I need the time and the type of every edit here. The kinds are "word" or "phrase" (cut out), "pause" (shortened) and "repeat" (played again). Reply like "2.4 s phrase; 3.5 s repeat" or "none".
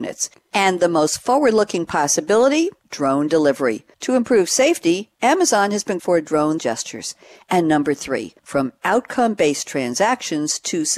2.8 s pause; 3.9 s pause; 5.1 s pause; 6.0 s phrase; 6.6 s phrase; 8.4 s pause